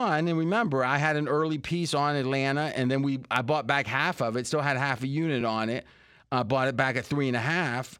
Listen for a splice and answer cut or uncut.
uncut